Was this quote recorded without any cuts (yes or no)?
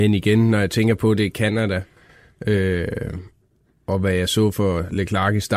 yes